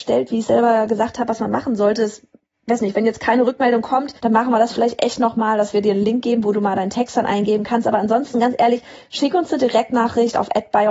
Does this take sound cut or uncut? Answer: cut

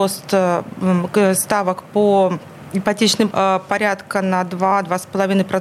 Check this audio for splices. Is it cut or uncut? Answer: cut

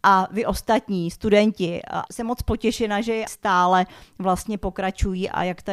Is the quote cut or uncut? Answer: cut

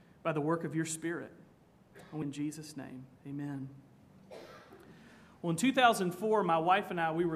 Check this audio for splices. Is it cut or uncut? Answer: cut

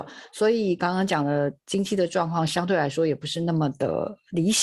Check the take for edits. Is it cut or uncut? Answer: uncut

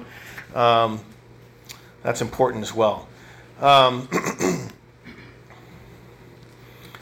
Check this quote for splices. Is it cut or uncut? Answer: uncut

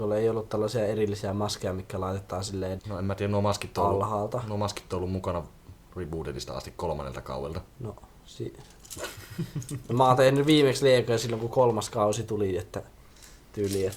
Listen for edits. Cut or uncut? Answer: cut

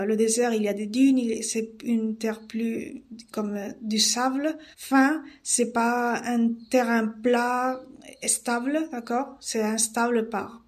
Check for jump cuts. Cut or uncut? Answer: cut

